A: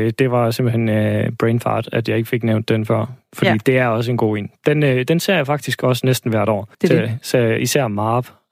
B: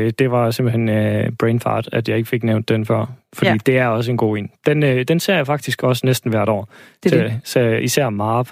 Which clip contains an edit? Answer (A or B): A